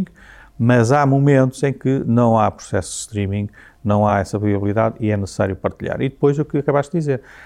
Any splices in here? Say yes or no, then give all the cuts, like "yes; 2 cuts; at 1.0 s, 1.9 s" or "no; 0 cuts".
no; 0 cuts